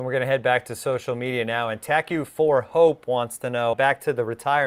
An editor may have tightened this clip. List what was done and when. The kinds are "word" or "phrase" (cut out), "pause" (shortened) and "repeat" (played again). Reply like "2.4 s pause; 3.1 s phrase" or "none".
3.7 s word